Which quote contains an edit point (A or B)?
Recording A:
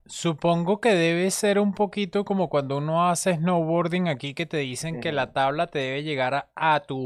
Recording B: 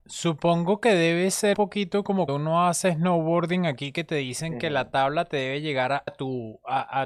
B